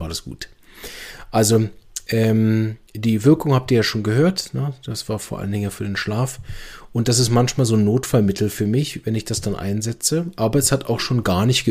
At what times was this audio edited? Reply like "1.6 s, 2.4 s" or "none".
2.9 s